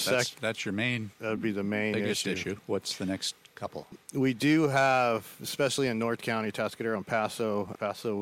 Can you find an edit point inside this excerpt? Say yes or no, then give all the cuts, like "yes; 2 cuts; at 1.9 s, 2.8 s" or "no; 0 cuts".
no; 0 cuts